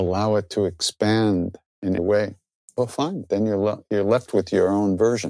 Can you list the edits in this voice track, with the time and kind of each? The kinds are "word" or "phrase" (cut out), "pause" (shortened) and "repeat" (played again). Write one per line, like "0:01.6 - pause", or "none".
0:02.0 - word

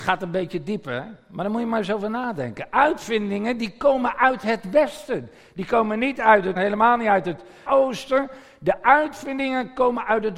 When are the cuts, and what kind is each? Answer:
0:06.6 - word
0:07.7 - word

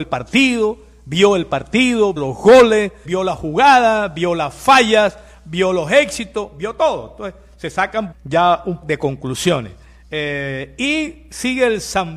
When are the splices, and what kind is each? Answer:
0:02.2 - word
0:03.0 - word
0:08.1 - word
0:08.8 - word

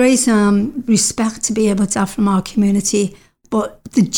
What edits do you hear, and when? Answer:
0:01.9 - word

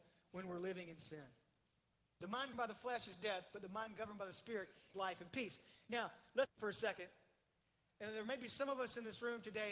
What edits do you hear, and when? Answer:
0:02.5 - word
0:04.9 - word
0:06.4 - word

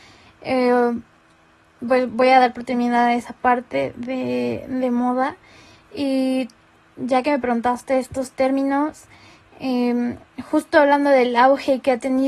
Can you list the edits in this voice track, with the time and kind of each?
none

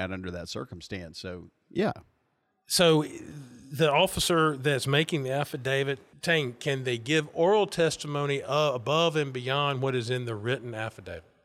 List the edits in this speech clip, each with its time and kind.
0:06.1 - word

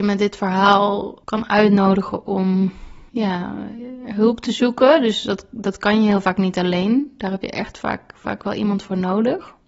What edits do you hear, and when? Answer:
0:01.2 - pause
0:03.1 - pause

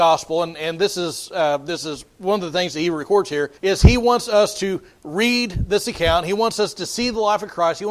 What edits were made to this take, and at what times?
0:03.6 - pause

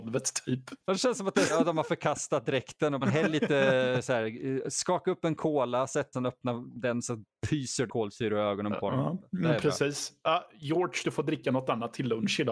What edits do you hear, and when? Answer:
0:01.5 - word
0:03.0 - phrase
0:06.1 - phrase
0:07.9 - phrase

